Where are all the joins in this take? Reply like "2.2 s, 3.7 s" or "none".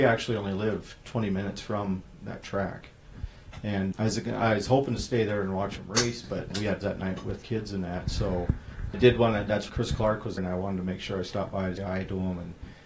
3.9 s, 6.5 s, 6.8 s, 7.4 s, 8.9 s, 9.7 s, 10.4 s, 11.8 s